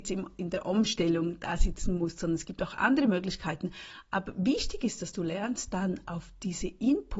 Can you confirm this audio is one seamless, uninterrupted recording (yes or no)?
yes